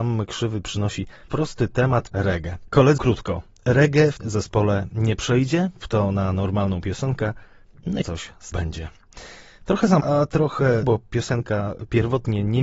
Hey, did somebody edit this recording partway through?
yes; 9 cuts; at 1.3 s, 2.1 s, 3.0 s, 4.2 s, 5.8 s, 8.0 s, 8.5 s, 10.0 s, 10.8 s

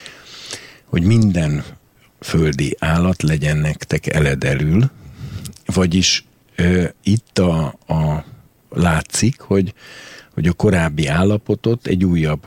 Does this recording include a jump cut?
no; 0 cuts

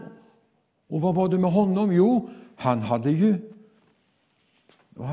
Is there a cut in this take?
no; 0 cuts

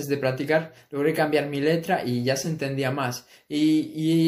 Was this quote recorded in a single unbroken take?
yes; 0 cuts

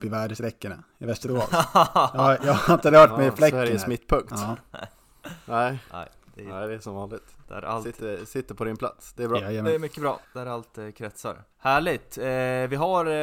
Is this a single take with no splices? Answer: no; 2 cuts; at 10.2 s, 11.5 s

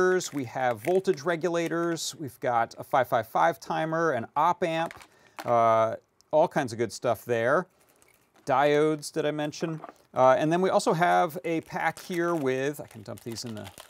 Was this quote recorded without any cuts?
yes; 0 cuts

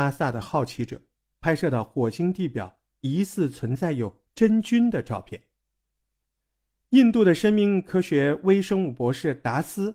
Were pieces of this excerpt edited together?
no; 0 cuts

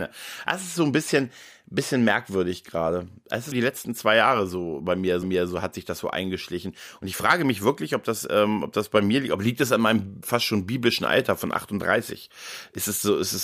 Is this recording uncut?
no; 3 cuts; at 3.5 s, 5.2 s, 10.2 s

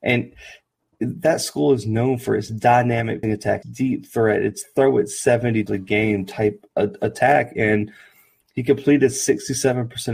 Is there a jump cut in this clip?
yes; 3 cuts; at 3.2 s, 3.6 s, 5.7 s

